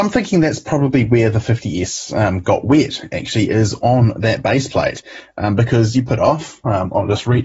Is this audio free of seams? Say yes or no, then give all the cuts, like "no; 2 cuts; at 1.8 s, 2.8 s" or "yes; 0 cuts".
no; 1 cut; at 6.1 s